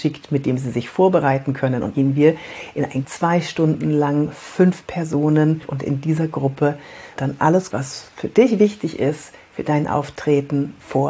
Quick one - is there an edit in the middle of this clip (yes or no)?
yes